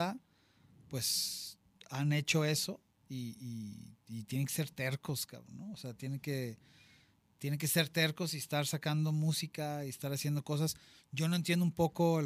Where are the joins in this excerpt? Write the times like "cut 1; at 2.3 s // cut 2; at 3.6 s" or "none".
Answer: none